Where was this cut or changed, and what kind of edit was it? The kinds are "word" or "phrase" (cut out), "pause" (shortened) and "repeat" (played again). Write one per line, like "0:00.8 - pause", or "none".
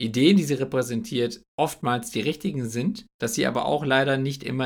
0:01.5 - pause
0:03.1 - pause